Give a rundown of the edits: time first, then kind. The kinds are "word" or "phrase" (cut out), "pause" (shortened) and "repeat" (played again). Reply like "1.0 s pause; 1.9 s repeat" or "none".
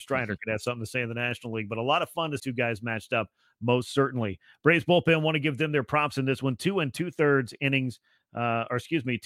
2.4 s phrase